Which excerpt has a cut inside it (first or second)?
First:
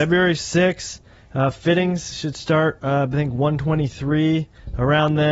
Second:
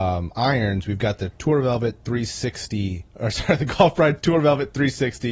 second